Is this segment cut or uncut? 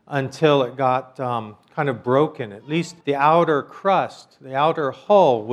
cut